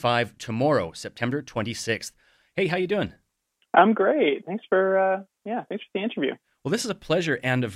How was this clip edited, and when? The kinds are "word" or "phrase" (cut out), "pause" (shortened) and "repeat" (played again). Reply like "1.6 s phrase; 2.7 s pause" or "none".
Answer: none